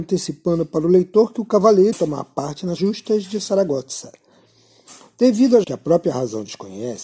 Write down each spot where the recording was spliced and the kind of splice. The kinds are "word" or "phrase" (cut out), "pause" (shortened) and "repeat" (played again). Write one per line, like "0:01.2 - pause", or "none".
0:01.9 - word
0:02.8 - word
0:05.6 - word